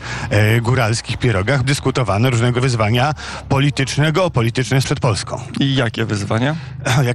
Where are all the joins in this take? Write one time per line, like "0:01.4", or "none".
0:01.6
0:02.6
0:04.8